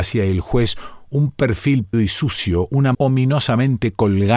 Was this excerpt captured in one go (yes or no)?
no